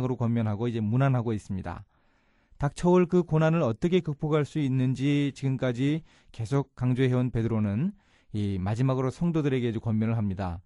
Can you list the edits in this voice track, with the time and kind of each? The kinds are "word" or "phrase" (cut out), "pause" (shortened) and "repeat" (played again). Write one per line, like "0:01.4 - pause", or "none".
none